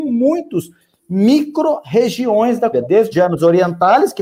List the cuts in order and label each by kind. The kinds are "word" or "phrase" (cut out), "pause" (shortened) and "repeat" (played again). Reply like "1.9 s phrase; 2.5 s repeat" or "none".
2.7 s word; 3.1 s word